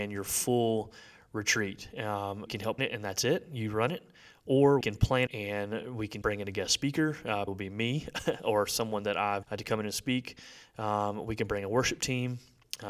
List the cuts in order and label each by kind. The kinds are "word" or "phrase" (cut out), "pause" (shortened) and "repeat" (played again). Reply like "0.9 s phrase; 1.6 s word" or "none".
2.5 s word; 2.8 s word; 4.8 s word; 5.3 s word; 6.2 s word; 7.5 s word; 9.4 s word